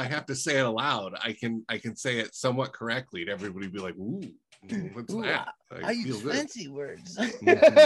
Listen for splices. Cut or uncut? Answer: uncut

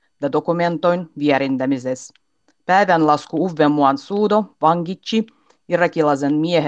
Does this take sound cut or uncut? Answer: uncut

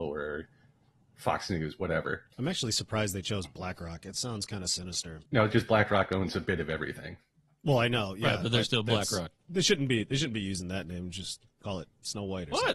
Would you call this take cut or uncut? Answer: cut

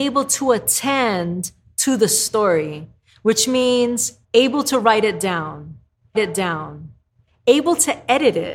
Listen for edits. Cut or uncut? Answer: cut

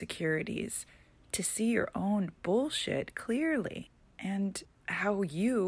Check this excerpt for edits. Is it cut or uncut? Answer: uncut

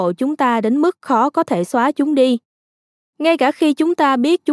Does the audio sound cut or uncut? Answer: uncut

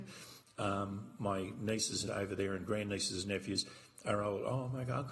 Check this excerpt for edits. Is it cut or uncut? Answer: cut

